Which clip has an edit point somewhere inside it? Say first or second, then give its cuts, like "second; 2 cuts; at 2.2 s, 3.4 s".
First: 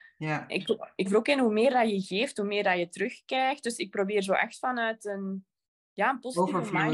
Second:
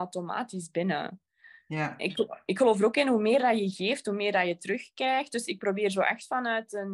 first; 1 cut; at 1.1 s